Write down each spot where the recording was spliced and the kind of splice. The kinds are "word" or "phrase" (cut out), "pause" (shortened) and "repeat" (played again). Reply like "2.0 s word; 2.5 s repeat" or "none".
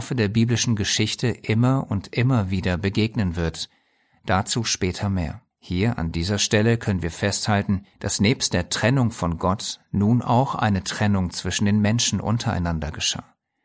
5.5 s pause; 7.9 s pause

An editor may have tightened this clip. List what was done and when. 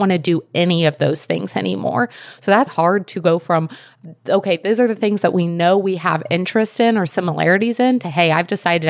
2.7 s word

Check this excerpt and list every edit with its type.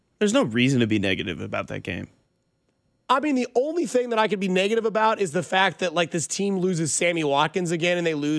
none

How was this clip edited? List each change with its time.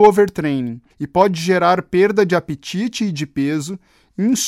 0.9 s pause

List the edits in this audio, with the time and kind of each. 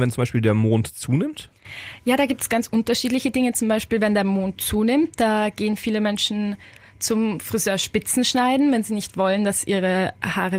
none

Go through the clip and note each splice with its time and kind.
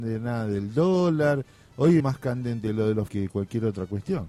2.0 s word; 3.1 s word

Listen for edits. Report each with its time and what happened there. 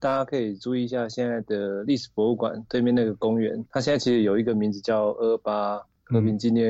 3.7 s word

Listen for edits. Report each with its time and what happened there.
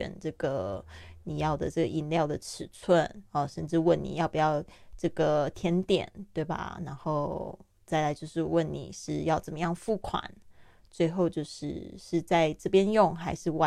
3.3 s pause

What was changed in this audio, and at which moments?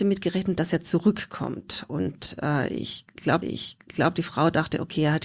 3.4 s repeat

